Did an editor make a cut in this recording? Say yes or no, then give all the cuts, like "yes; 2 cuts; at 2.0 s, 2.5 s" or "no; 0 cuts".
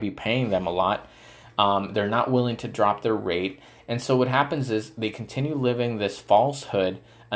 no; 0 cuts